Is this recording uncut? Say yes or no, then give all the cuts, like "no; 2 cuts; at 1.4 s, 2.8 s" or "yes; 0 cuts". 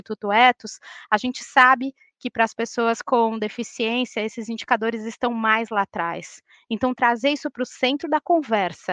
yes; 0 cuts